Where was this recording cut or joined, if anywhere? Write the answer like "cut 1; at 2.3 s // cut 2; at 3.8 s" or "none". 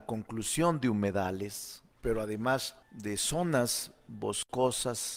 cut 1; at 1.9 s // cut 2; at 2.8 s